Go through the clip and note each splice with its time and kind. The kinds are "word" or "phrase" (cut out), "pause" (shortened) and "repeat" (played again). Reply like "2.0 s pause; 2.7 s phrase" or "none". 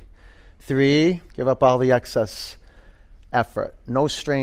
1.3 s pause